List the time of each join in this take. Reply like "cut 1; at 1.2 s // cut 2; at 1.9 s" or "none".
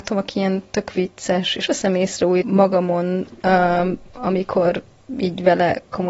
cut 1; at 1.7 s // cut 2; at 2.4 s